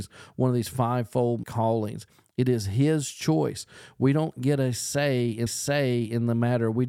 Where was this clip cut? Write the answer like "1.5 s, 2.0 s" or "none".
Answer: 1.4 s, 5.5 s